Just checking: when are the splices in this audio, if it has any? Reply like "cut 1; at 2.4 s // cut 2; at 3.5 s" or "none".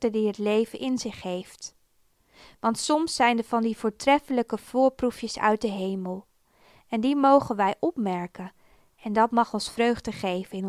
none